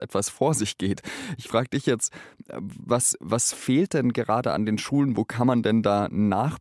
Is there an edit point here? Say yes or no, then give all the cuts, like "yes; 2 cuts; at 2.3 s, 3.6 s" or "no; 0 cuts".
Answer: no; 0 cuts